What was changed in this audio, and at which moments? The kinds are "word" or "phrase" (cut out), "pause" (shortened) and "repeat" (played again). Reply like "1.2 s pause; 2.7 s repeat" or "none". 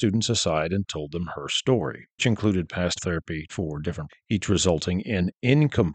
2.2 s word; 3.0 s word; 3.5 s word; 4.1 s word